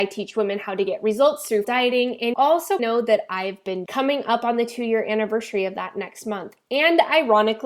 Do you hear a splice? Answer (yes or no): yes